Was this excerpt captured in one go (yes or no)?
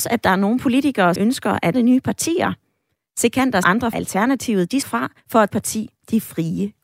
no